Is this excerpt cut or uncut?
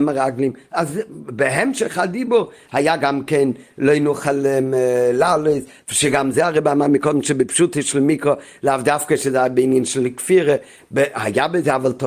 uncut